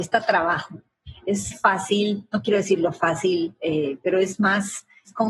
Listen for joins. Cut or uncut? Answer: cut